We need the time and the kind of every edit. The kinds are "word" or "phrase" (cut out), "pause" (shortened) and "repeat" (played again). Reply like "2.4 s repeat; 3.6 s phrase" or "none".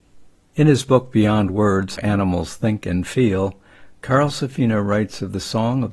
2.0 s word